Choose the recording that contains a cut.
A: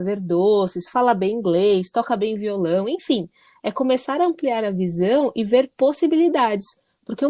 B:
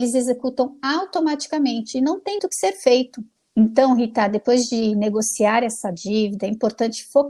B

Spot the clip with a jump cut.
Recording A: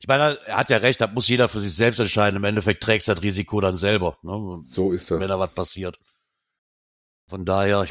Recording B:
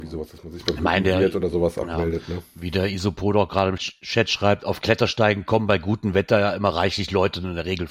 B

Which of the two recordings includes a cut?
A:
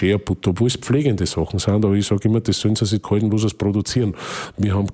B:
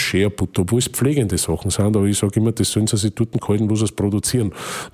A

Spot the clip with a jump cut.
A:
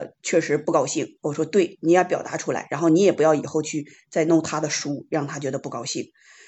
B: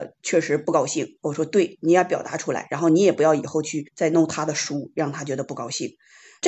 B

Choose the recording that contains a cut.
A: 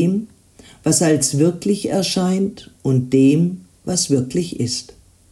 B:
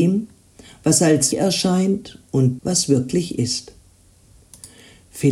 B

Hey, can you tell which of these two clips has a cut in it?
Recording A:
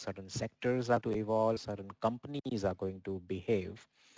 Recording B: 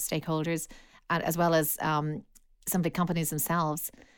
A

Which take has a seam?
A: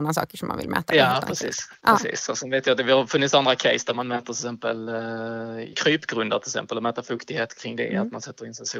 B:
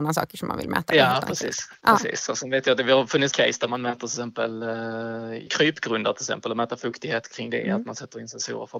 B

